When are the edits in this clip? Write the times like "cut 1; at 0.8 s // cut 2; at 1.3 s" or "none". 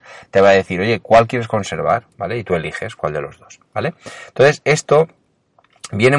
cut 1; at 2.1 s

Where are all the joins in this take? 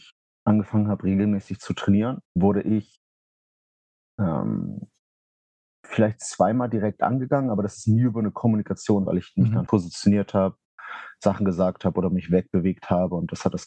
cut 1; at 2.2 s // cut 2; at 9.1 s // cut 3; at 9.7 s

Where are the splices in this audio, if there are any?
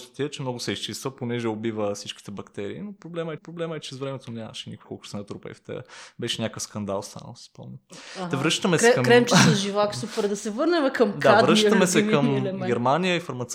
cut 1; at 3.4 s // cut 2; at 4.8 s

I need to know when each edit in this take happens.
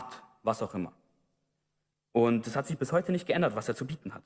none

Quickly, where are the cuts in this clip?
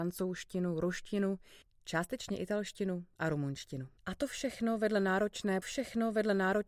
cut 1; at 1.6 s // cut 2; at 4.0 s // cut 3; at 5.6 s

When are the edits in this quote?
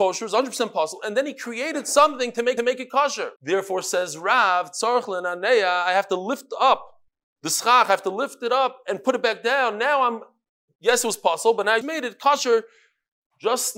cut 1; at 2.6 s // cut 2; at 3.4 s // cut 3; at 7.1 s // cut 4; at 11.8 s

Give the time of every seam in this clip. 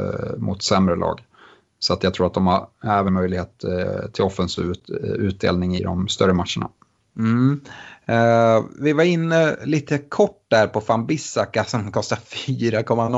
cut 1; at 3.1 s // cut 2; at 5.8 s

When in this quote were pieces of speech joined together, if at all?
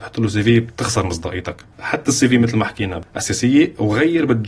none

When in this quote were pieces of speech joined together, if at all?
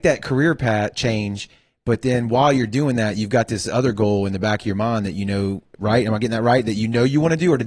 none

